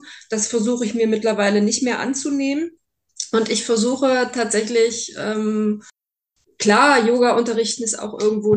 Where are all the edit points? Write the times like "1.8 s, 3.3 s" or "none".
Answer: 6.3 s

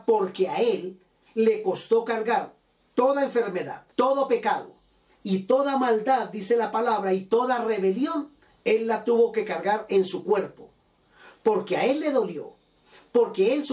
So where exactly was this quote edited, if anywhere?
3.9 s

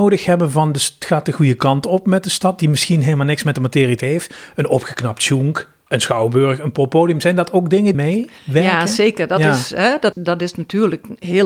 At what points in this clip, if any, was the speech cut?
4.0 s, 5.8 s, 7.9 s, 8.4 s, 10.1 s

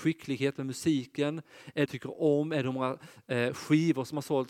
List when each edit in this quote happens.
1.9 s

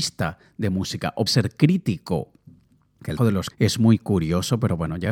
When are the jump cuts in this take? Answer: 1.3 s, 3.2 s, 3.5 s

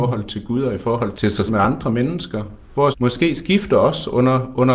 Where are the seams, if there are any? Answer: 1.1 s, 1.5 s, 2.9 s

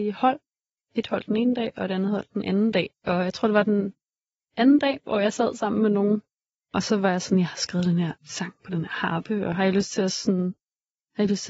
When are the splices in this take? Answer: 8.2 s

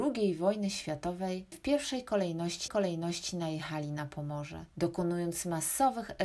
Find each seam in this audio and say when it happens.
1.5 s, 2.7 s, 4.7 s

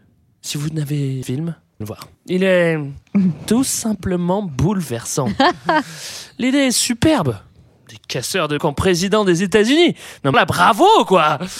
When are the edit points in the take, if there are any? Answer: 1.2 s, 1.8 s, 2.1 s, 8.6 s, 10.3 s

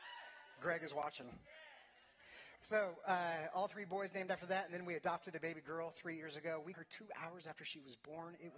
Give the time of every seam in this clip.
6.7 s

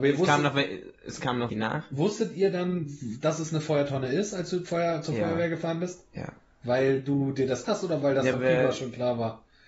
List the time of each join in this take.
1.5 s, 4.6 s, 6.5 s, 7.6 s, 8.3 s

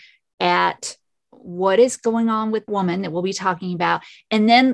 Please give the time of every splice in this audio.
2.7 s

